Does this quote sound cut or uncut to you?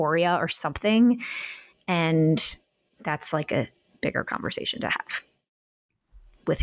uncut